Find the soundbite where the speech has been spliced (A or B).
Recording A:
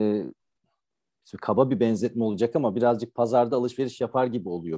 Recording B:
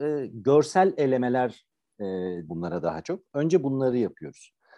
B